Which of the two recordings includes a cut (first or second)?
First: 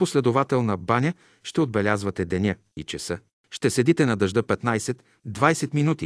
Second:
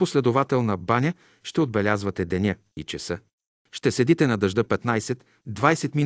first